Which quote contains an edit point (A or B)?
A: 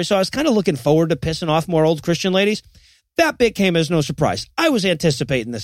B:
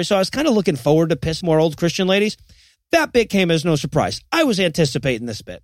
B